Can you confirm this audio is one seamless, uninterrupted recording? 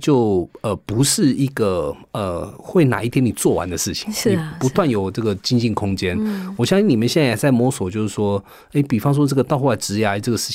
yes; 0 cuts

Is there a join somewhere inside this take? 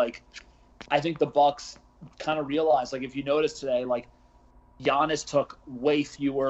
no; 0 cuts

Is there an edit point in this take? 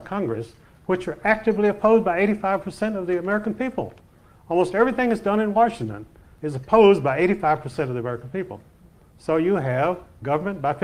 no; 0 cuts

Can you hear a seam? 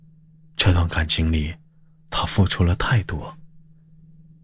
no; 0 cuts

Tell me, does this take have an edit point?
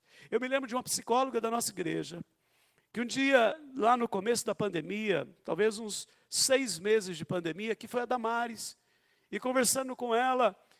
no; 0 cuts

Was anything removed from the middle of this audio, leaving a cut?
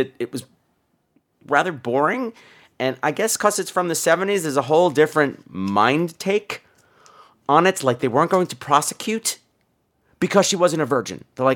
no; 0 cuts

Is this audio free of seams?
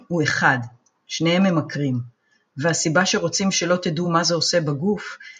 yes; 0 cuts

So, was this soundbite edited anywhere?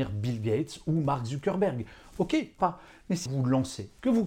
yes; 2 cuts; at 2.6 s, 3.3 s

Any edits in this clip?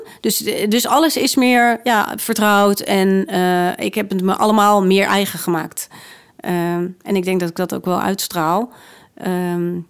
no; 0 cuts

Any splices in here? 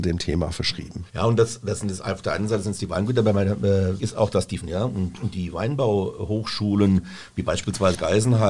yes; 3 cuts; at 1.1 s, 4.0 s, 4.6 s

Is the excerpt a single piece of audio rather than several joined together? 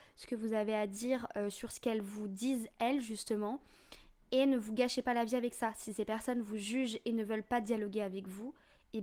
yes; 0 cuts

